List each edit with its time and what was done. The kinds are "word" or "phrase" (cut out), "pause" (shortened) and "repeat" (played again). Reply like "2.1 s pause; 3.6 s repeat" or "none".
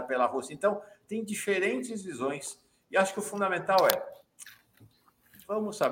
none